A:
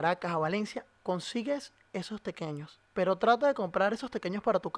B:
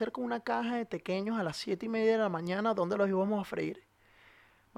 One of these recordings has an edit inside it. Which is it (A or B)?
A